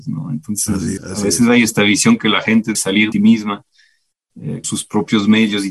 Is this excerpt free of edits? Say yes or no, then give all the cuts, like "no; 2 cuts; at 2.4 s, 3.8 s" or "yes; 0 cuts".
no; 4 cuts; at 1.0 s, 2.7 s, 3.1 s, 4.6 s